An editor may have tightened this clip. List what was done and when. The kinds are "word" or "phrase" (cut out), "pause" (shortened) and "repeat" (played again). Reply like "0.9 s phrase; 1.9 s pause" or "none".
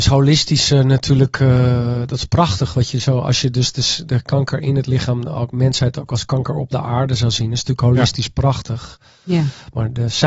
none